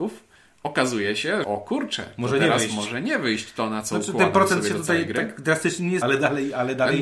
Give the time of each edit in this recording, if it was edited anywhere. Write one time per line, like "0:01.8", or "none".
0:01.4
0:06.0